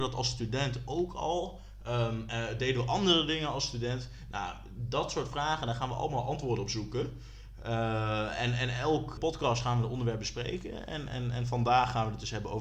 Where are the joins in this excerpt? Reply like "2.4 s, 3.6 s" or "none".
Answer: 9.2 s